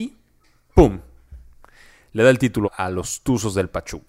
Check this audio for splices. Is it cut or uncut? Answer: cut